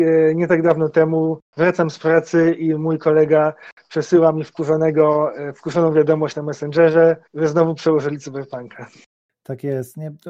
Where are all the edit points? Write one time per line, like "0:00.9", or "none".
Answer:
0:01.5
0:07.3